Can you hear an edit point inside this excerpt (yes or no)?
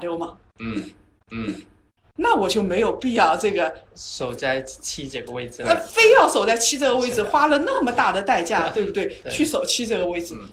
yes